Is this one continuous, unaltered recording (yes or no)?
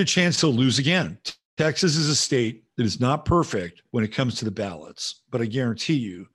no